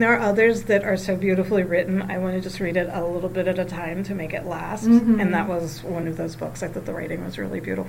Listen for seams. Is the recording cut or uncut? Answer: uncut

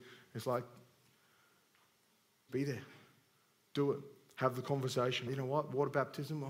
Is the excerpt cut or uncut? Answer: cut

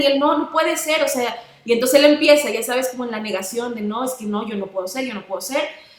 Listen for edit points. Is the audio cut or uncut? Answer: uncut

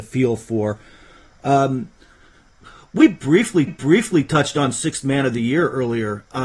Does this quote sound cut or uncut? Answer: cut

